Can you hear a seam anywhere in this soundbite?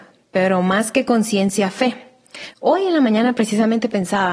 no; 0 cuts

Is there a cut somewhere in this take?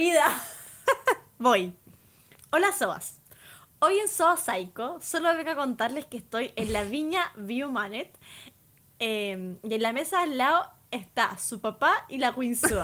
no; 0 cuts

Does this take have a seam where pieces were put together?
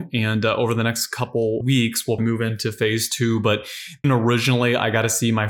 yes; 3 cuts; at 1.6 s, 2.2 s, 4.0 s

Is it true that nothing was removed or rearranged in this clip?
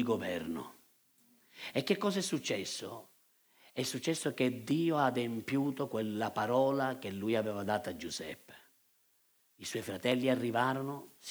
yes; 0 cuts

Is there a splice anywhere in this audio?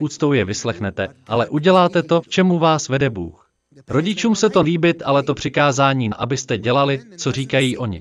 yes; 3 cuts; at 2.2 s, 4.6 s, 6.1 s

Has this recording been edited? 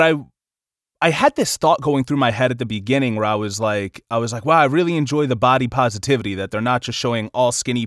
no; 0 cuts

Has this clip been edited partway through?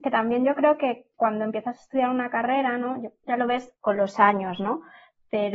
yes; 3 cuts; at 1.1 s, 3.2 s, 3.8 s

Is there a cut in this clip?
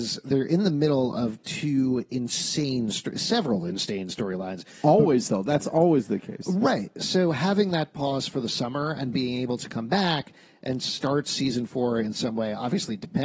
no; 0 cuts

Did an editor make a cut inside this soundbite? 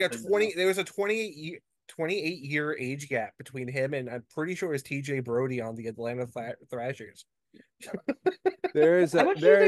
no; 0 cuts

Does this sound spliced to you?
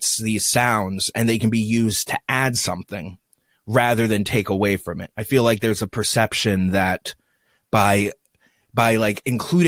no; 0 cuts

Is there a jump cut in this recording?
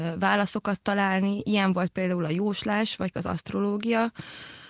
yes; 1 cut; at 3.1 s

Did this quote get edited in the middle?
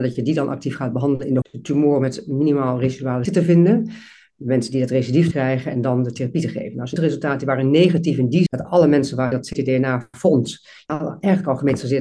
yes; 7 cuts; at 1.4 s, 3.3 s, 5.3 s, 7.0 s, 8.5 s, 9.3 s, 10.9 s

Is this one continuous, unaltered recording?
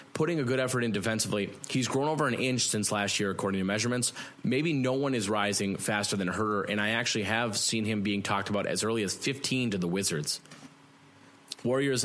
yes; 0 cuts

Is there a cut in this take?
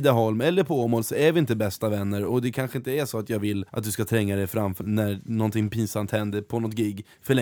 yes; 2 cuts; at 3.7 s, 4.8 s

